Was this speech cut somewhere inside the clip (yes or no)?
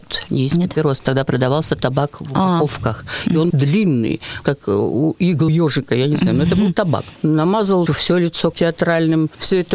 yes